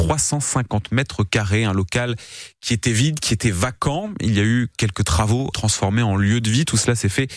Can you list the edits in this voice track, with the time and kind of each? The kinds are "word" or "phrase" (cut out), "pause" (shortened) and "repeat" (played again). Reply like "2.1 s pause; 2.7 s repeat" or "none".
5.5 s phrase